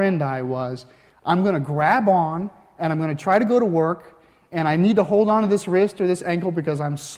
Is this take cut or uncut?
uncut